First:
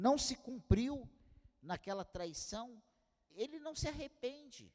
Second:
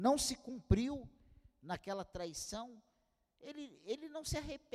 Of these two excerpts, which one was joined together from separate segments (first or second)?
first